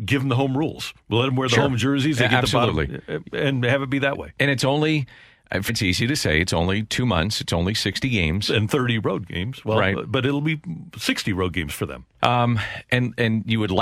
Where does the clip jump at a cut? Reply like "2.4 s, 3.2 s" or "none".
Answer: 5.7 s